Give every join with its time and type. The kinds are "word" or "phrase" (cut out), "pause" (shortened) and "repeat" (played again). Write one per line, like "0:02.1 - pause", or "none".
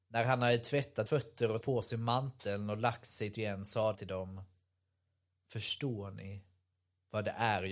0:01.1 - word
0:01.6 - word
0:03.3 - word
0:03.9 - word